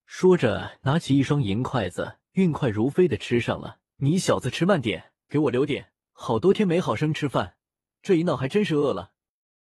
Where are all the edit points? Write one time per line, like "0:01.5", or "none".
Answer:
0:02.3
0:03.9
0:05.2
0:06.0